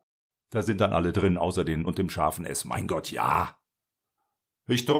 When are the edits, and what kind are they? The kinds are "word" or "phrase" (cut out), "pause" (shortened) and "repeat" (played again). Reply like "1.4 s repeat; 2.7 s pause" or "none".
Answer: 1.9 s word